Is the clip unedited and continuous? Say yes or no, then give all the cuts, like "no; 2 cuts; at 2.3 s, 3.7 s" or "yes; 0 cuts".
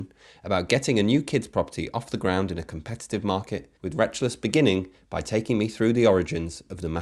no; 1 cut; at 3.8 s